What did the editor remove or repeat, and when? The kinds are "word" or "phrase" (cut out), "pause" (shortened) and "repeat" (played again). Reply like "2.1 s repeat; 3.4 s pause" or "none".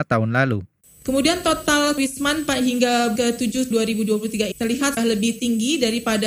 2.0 s word; 3.2 s word; 3.7 s word; 4.5 s word; 5.0 s word